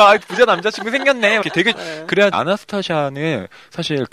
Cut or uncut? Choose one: cut